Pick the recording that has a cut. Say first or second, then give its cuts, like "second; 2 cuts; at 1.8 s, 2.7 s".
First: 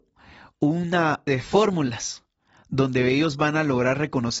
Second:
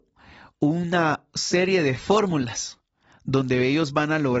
first; 1 cut; at 1.3 s